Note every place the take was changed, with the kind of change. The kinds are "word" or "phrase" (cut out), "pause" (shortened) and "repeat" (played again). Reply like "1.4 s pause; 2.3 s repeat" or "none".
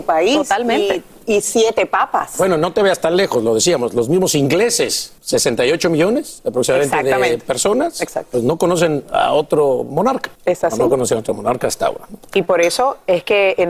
5.2 s pause; 10.3 s pause